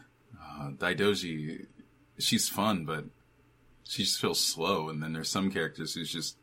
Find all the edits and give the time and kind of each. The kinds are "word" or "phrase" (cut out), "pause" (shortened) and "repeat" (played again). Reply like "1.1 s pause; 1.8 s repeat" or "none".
none